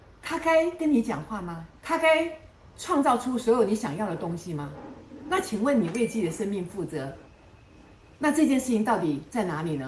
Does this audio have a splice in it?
no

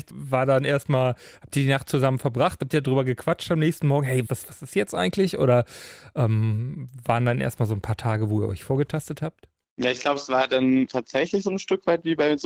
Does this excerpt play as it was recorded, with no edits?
no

